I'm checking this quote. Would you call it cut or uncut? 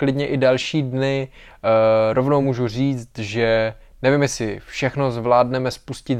uncut